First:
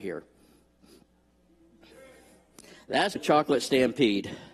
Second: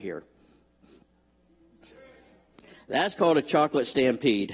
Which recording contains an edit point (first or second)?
first